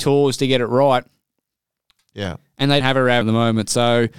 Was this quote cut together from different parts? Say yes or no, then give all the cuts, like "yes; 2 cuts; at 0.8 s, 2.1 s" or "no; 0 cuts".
yes; 2 cuts; at 2.8 s, 3.2 s